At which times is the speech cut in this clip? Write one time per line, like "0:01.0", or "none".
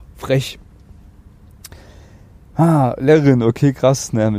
none